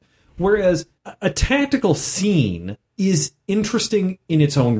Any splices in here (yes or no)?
yes